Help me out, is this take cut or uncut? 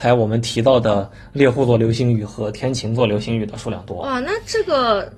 uncut